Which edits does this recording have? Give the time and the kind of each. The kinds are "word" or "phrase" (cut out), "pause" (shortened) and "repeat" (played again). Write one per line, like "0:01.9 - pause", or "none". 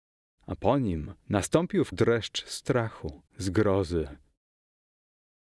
0:01.2 - pause
0:01.9 - word
0:03.3 - pause